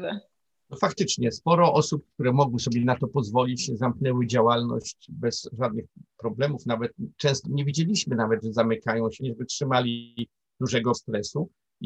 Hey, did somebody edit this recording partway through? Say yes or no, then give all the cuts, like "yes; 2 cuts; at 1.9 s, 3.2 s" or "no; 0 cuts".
yes; 3 cuts; at 7.4 s, 9.2 s, 10.9 s